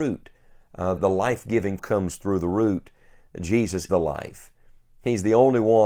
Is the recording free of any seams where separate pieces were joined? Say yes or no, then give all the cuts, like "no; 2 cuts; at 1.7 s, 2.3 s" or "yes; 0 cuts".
no; 3 cuts; at 1.0 s, 1.8 s, 3.9 s